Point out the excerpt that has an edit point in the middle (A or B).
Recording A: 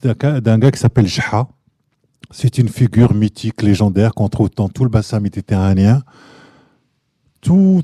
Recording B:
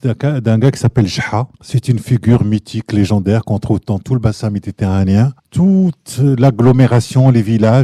B